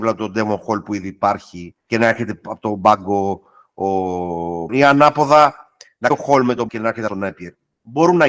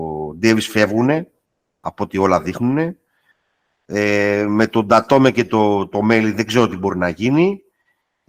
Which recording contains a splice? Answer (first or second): first